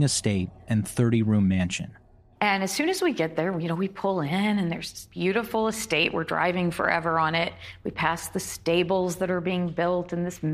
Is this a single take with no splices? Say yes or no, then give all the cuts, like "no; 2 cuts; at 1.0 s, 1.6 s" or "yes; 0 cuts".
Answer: yes; 0 cuts